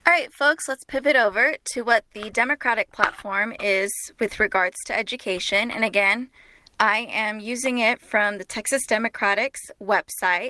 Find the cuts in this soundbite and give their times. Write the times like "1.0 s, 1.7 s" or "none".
6.6 s

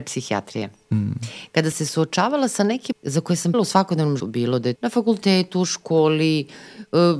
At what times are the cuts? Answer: 1.7 s, 2.9 s, 3.5 s, 4.2 s, 4.8 s

